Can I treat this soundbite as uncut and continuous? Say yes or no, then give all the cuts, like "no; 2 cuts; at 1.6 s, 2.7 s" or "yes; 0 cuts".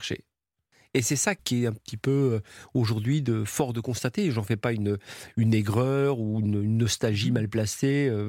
yes; 0 cuts